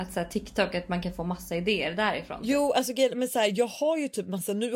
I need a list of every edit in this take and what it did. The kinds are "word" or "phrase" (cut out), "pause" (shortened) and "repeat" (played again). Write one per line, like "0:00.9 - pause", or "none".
none